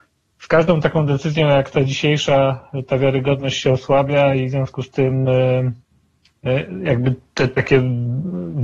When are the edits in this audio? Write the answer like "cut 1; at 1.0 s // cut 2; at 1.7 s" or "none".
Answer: none